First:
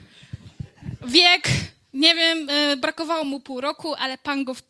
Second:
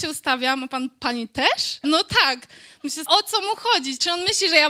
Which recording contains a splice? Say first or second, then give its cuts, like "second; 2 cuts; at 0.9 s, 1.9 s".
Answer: second; 2 cuts; at 1.8 s, 3.1 s